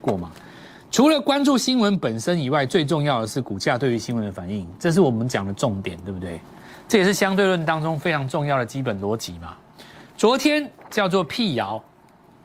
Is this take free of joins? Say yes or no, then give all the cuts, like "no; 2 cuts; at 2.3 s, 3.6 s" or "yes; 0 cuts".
yes; 0 cuts